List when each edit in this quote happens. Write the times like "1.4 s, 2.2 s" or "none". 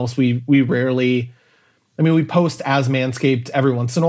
none